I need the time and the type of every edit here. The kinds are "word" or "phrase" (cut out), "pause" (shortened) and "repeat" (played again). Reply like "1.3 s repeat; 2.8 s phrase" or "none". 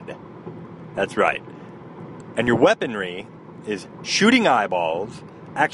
none